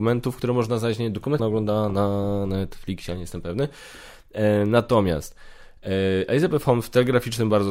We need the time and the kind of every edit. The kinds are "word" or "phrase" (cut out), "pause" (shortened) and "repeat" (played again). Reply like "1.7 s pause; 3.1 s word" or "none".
1.4 s phrase

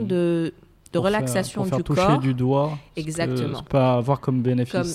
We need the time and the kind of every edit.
3.7 s word

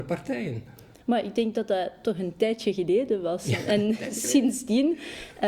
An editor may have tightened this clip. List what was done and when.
none

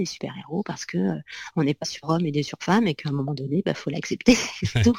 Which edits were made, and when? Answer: 1.8 s word

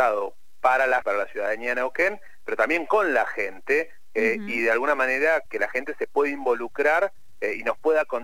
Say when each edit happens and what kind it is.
1.0 s phrase; 5.5 s word

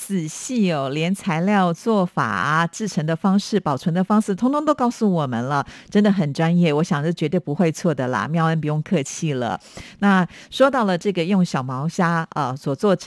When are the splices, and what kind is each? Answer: none

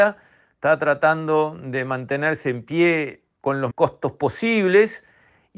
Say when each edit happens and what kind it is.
3.7 s word

